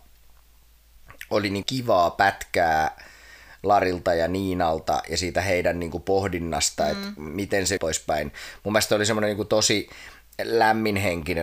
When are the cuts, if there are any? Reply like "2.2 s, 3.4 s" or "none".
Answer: 1.6 s, 7.8 s